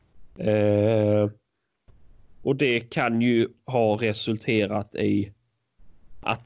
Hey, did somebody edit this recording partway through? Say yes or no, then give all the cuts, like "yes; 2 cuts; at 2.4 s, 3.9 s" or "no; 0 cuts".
no; 0 cuts